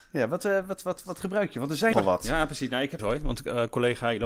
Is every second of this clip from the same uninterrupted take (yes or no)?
no